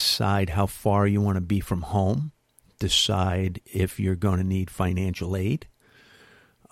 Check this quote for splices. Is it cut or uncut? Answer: uncut